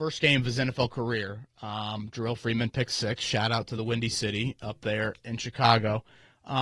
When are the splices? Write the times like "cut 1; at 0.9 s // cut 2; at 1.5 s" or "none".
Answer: none